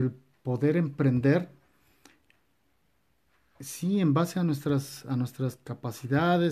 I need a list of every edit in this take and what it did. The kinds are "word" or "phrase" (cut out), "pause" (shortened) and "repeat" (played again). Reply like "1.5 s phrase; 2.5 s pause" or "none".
none